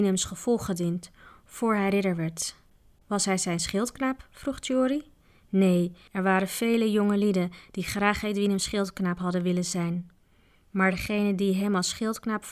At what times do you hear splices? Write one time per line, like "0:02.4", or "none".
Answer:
none